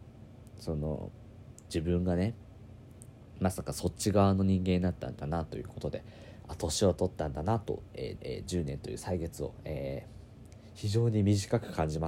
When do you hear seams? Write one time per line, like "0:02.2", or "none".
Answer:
0:08.2